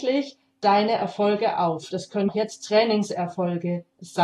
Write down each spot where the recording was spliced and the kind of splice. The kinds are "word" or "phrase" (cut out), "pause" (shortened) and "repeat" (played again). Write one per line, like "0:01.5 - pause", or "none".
0:02.3 - word

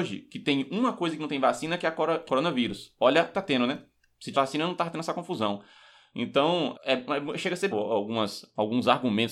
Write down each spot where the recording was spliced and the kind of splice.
0:02.3 - phrase
0:03.3 - phrase
0:04.3 - word
0:06.7 - word
0:07.7 - word

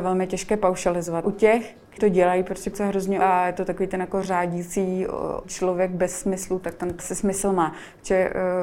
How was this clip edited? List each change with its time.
0:01.2 - word
0:02.0 - word
0:02.7 - word
0:03.2 - word
0:05.4 - word
0:07.0 - word

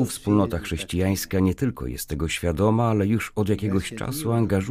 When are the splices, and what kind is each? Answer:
none

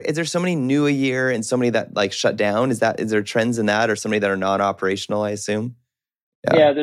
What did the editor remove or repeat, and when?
none

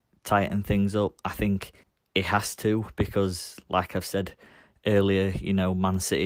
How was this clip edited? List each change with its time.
0:01.8 - pause
0:03.7 - word

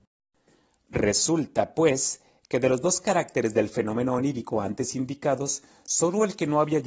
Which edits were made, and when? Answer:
none

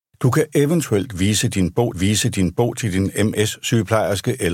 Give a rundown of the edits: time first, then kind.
0:01.9 - repeat

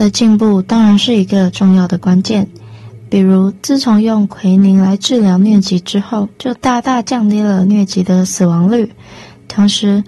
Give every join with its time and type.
0:06.3 - pause

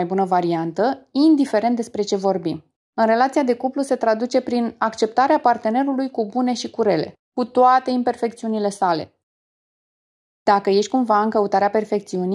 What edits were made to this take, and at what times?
0:02.8 - pause
0:07.2 - pause

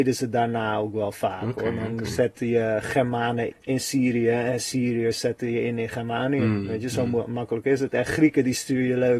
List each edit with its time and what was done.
0:03.5 - word

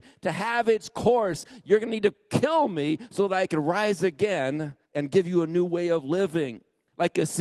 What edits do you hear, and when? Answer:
0:04.8 - pause

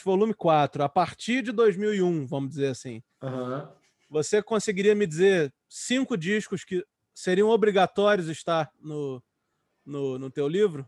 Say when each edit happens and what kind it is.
none

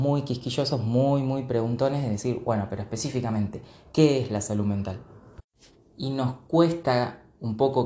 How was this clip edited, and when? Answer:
none

